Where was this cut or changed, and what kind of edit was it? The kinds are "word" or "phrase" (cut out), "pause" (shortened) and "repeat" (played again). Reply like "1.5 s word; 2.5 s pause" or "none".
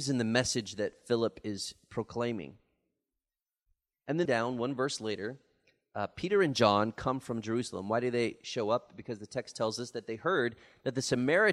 4.3 s phrase